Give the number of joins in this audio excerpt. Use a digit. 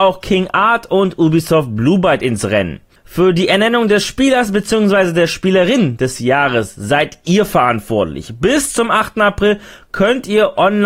0